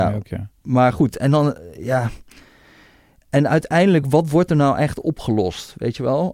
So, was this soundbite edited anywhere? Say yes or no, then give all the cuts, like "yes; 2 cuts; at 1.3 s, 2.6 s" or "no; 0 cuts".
no; 0 cuts